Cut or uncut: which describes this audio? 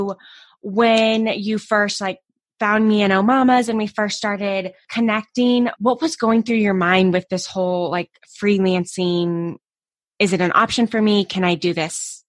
uncut